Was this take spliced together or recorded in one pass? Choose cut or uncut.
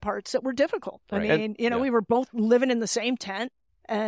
uncut